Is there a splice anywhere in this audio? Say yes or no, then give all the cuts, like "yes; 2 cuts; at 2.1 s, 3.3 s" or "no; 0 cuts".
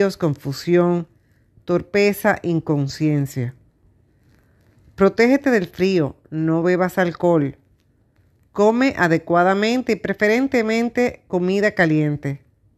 no; 0 cuts